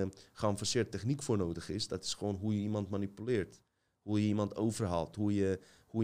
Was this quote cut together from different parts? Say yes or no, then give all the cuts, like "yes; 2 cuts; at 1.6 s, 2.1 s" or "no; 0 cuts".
no; 0 cuts